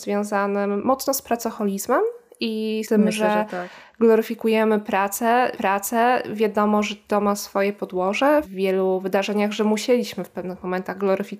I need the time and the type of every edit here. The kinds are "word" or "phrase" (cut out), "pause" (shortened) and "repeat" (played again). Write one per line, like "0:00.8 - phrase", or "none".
0:02.8 - word
0:05.5 - repeat
0:08.4 - phrase